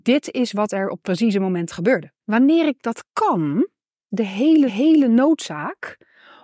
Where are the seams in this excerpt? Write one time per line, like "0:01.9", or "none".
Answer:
0:01.0
0:02.2
0:04.1
0:04.7